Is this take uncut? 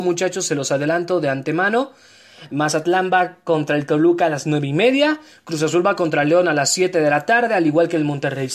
yes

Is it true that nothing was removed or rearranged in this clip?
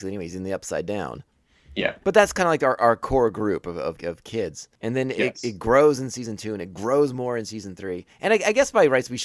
no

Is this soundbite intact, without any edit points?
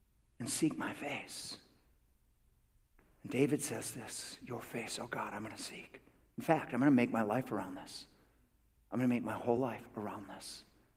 yes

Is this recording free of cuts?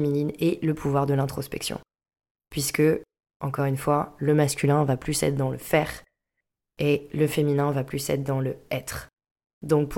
yes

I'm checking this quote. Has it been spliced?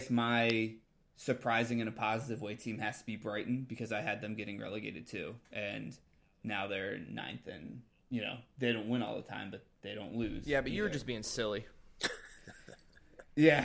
no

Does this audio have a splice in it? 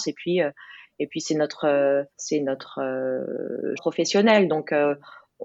yes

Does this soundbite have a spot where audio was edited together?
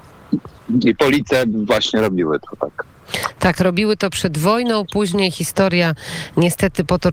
no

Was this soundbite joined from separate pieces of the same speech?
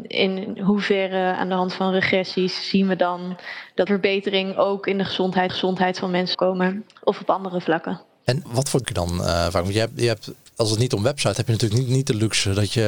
yes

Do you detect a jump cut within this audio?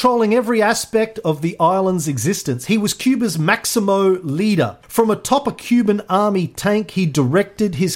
yes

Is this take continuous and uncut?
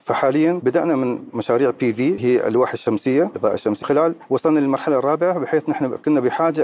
no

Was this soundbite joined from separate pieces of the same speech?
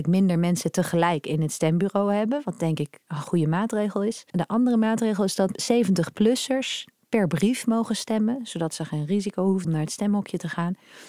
yes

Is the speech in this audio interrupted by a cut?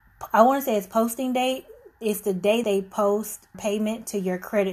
yes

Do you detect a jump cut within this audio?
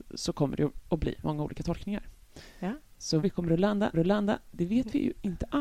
yes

